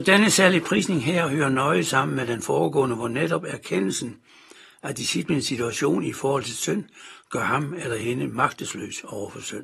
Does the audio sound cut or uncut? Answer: uncut